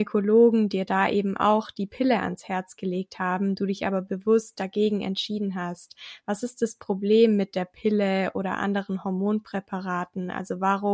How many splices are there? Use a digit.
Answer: 0